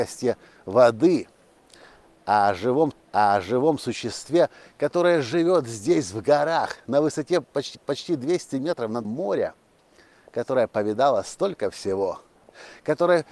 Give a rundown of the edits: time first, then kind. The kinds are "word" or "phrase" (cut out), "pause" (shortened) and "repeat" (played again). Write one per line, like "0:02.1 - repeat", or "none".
0:02.9 - repeat
0:07.7 - repeat
0:09.0 - word